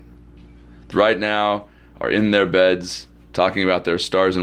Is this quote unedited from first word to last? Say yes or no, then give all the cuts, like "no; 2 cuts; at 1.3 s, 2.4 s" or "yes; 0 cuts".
no; 1 cut; at 0.9 s